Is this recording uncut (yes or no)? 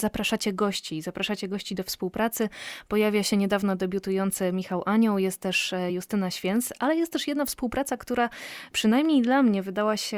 yes